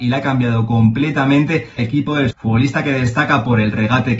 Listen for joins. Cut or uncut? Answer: cut